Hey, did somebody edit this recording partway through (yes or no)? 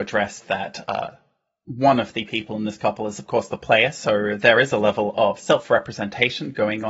no